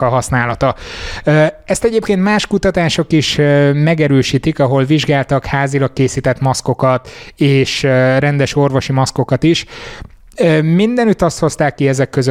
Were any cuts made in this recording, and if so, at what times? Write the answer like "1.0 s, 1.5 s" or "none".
none